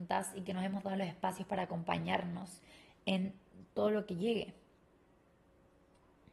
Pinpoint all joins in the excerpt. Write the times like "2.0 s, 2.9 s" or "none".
none

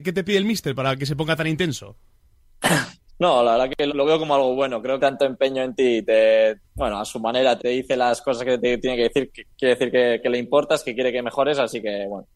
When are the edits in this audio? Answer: 3.1 s, 3.9 s, 5.0 s, 6.7 s, 7.6 s, 9.5 s

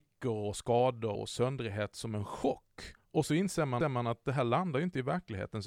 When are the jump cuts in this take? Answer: 1.1 s, 3.0 s, 3.8 s

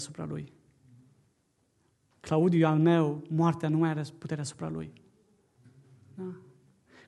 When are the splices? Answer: none

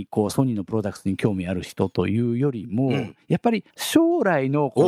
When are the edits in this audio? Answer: 3.7 s

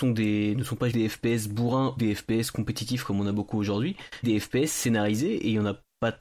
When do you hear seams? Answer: 0.9 s, 2.0 s, 4.2 s

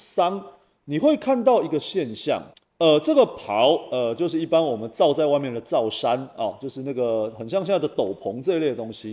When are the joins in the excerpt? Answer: 2.5 s

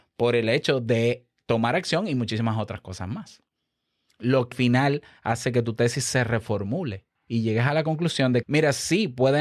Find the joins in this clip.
4.5 s, 7.2 s, 8.4 s

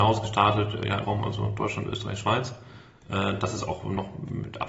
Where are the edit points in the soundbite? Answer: 1.0 s

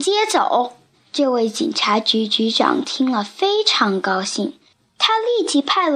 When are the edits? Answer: 0.9 s

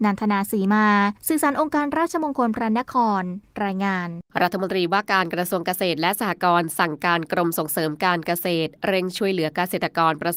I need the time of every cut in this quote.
1.2 s, 4.3 s

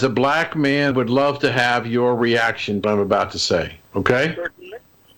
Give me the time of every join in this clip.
0.9 s, 2.8 s, 3.9 s

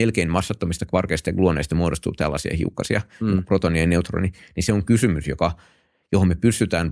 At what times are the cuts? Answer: none

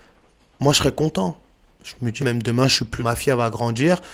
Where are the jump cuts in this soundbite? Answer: 2.2 s, 3.0 s

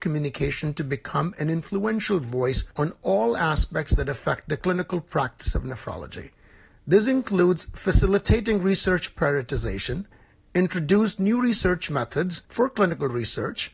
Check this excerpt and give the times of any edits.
none

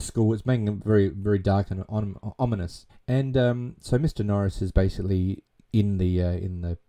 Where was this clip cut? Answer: 2.9 s

